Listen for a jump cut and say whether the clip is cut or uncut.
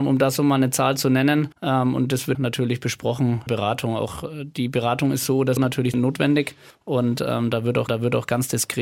cut